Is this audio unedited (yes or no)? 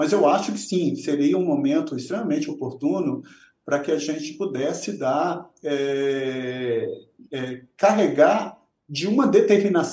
yes